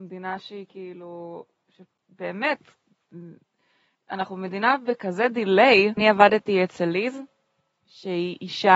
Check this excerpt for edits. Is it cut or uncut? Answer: uncut